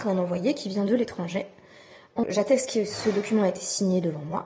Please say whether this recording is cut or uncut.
cut